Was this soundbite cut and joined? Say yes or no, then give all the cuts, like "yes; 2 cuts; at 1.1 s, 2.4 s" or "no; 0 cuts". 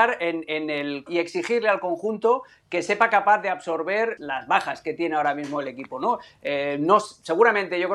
yes; 2 cuts; at 1.1 s, 4.2 s